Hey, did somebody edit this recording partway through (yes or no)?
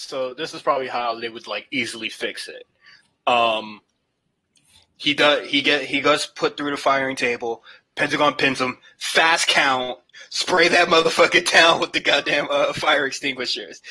no